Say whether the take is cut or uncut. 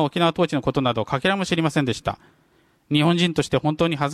uncut